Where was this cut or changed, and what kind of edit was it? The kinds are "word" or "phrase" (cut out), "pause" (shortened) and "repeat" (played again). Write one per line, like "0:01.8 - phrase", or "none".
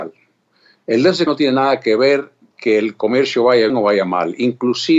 0:01.3 - word
0:02.5 - word
0:03.7 - word